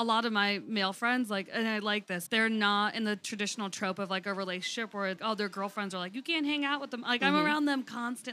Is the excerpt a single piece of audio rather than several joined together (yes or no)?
no